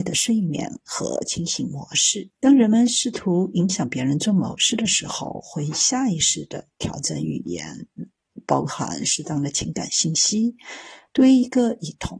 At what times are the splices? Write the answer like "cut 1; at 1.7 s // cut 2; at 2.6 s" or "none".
cut 1; at 2.3 s